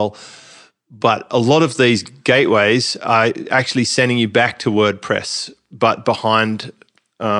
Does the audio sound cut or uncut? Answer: uncut